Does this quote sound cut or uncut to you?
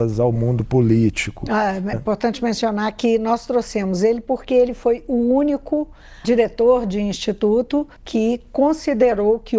cut